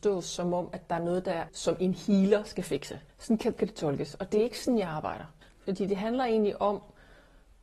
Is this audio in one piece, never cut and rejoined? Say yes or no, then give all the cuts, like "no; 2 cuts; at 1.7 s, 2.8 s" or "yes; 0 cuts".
no; 4 cuts; at 1.5 s, 3.1 s, 3.6 s, 5.4 s